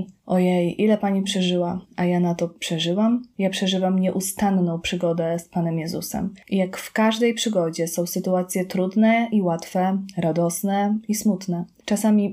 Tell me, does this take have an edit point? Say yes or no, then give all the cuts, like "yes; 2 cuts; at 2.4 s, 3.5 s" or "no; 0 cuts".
yes; 1 cut; at 1.8 s